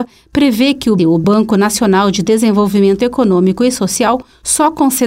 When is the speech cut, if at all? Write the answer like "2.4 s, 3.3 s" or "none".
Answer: 1.0 s